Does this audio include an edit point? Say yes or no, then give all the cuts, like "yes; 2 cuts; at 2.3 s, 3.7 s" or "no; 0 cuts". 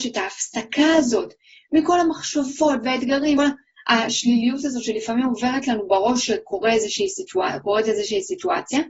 yes; 1 cut; at 3.4 s